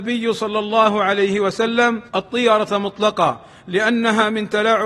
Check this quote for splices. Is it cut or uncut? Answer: cut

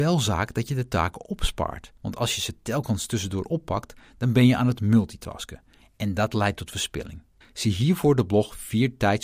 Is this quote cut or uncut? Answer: cut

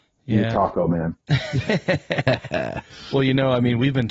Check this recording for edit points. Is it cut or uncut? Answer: cut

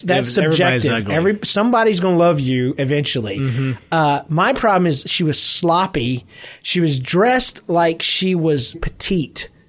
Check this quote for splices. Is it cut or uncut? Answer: cut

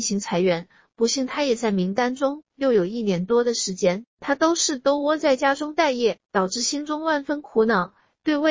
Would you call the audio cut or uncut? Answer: cut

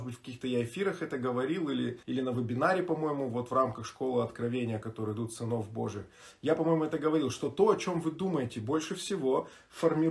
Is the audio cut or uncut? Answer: cut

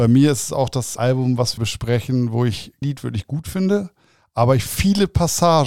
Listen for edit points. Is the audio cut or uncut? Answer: cut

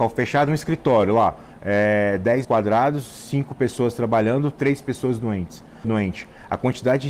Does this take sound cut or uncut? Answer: cut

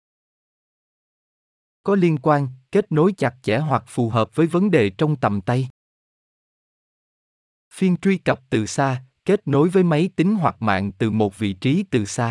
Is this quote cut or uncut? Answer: uncut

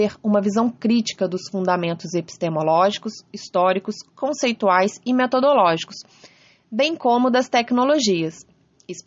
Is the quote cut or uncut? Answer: uncut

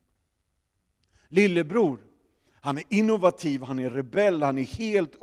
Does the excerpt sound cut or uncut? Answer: uncut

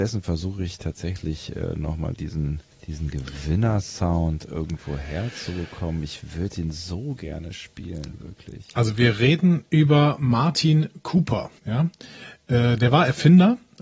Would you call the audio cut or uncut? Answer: cut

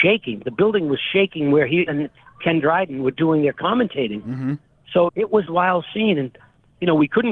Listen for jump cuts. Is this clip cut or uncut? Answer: cut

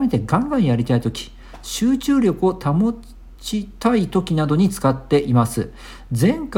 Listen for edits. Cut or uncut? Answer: cut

